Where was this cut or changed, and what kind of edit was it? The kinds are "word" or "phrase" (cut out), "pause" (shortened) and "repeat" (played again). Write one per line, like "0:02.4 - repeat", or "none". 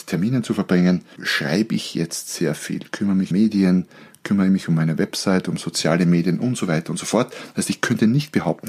0:01.2 - word
0:03.3 - word